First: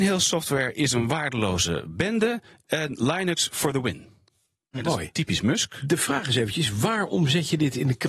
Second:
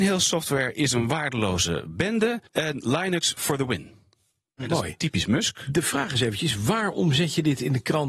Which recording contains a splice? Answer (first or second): second